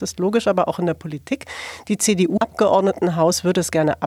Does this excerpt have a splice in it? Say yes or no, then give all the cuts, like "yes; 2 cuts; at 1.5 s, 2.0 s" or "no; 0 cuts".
yes; 1 cut; at 2.4 s